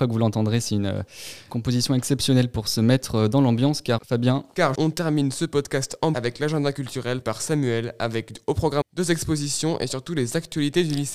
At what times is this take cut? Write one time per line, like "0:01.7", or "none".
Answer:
0:01.5
0:04.0
0:04.7
0:06.1
0:07.2
0:08.8

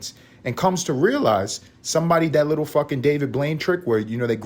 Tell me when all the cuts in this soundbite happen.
0:02.3

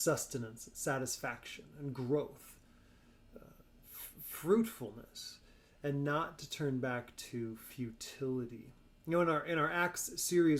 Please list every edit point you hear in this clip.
none

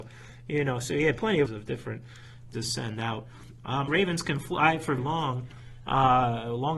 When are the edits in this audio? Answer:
0:01.5
0:02.5
0:03.9
0:05.0

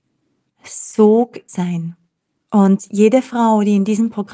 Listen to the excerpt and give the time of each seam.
0:01.5

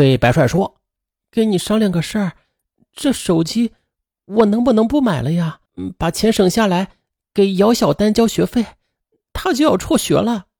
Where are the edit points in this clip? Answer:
0:05.7

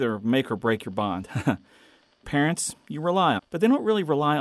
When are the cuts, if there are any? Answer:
0:02.2
0:03.4

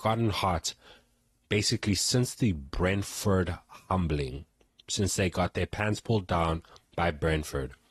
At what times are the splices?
none

